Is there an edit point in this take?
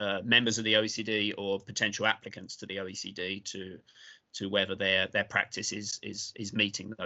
no; 0 cuts

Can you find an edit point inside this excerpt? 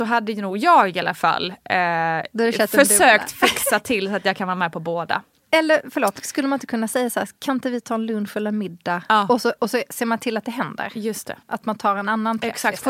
yes; 1 cut; at 11.4 s

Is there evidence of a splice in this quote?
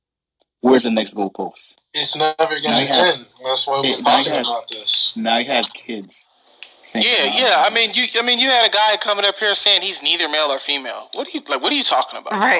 no; 0 cuts

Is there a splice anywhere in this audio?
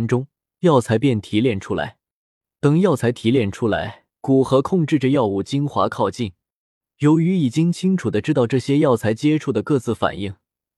yes; 1 cut; at 4.1 s

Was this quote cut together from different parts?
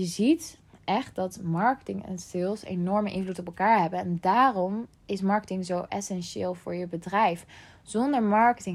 no; 0 cuts

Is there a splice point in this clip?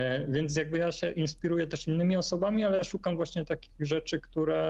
no; 0 cuts

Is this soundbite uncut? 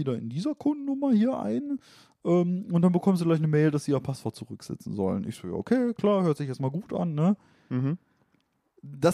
yes; 0 cuts

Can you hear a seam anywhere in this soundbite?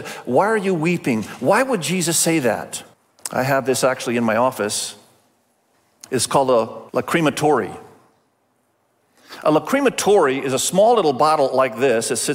yes; 3 cuts; at 2.9 s, 5.7 s, 6.9 s

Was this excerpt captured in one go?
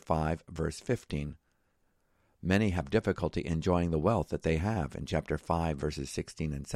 yes; 0 cuts

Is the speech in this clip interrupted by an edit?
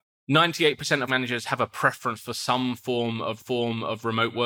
yes; 2 cuts; at 1.1 s, 3.4 s

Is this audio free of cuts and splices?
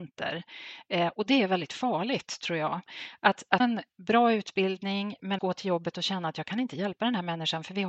no; 2 cuts; at 3.6 s, 5.4 s

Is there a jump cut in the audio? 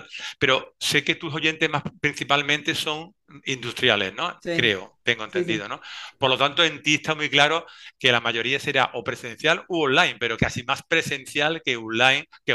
yes; 1 cut; at 10.4 s

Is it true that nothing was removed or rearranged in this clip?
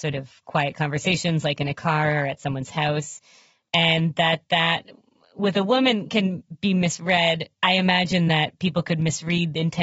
yes; 0 cuts

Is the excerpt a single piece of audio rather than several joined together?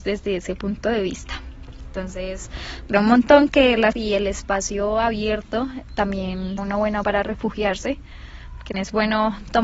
no; 6 cuts; at 2.9 s, 3.5 s, 3.9 s, 6.6 s, 7.0 s, 8.7 s

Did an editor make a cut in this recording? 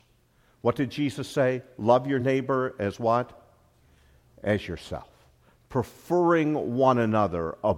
no; 0 cuts

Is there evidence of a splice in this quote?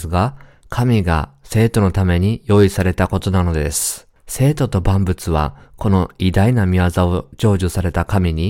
yes; 1 cut; at 4.2 s

